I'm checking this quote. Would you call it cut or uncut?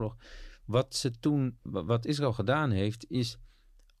cut